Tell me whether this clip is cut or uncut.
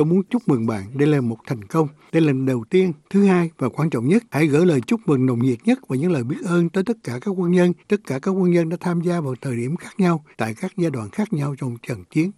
cut